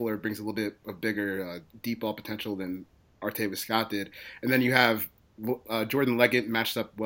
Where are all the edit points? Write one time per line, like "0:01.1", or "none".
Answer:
none